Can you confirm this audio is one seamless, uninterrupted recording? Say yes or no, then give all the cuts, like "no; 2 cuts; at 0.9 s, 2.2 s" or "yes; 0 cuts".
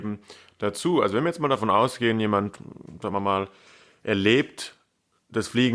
yes; 0 cuts